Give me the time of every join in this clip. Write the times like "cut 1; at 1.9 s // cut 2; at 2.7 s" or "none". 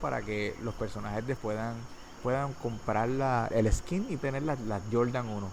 cut 1; at 1.4 s // cut 2; at 2.2 s // cut 3; at 3.5 s // cut 4; at 4.2 s